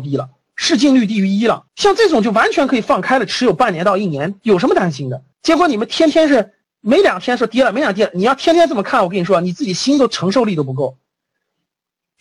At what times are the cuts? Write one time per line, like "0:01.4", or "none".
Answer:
0:01.7
0:05.3
0:06.6